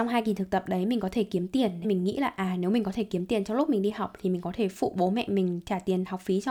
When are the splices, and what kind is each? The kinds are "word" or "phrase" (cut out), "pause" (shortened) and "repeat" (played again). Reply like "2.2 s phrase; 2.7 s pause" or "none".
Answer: 1.8 s word